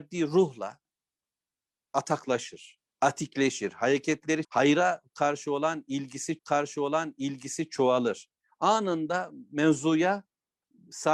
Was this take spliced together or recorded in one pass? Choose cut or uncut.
cut